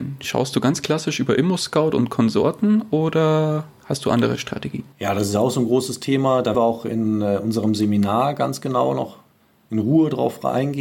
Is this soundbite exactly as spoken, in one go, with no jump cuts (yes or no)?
no